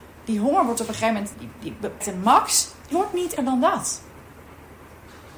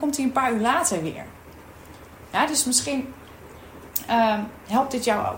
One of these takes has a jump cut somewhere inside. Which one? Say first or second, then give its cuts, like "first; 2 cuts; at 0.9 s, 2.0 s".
first; 4 cuts; at 1.3 s, 2.0 s, 2.9 s, 3.4 s